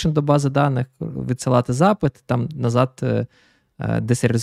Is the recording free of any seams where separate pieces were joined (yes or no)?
yes